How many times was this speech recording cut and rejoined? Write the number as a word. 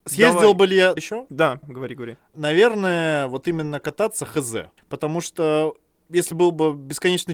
three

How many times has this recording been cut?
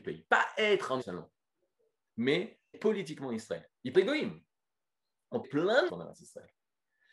five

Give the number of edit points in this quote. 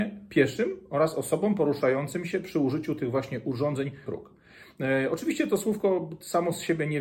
one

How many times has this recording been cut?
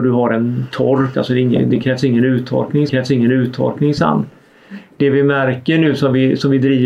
two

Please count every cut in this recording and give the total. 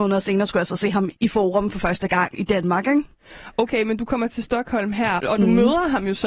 two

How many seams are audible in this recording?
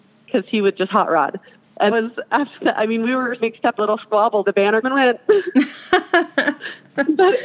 five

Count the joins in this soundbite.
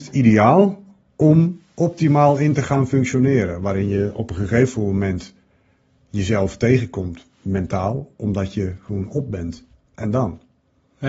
zero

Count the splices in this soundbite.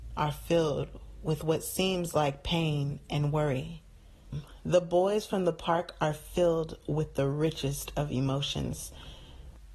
zero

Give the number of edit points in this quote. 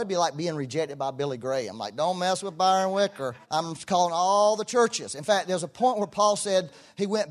one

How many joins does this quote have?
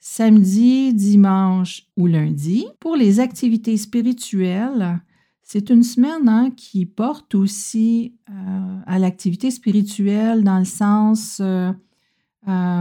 two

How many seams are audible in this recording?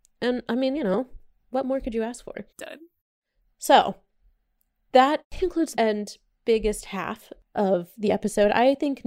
two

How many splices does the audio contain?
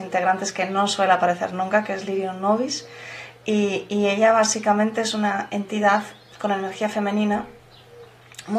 zero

